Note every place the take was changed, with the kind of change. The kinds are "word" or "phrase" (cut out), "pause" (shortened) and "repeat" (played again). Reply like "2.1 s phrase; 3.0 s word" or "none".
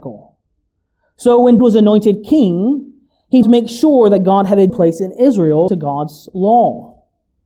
1.6 s word; 3.4 s word; 4.7 s word; 5.7 s word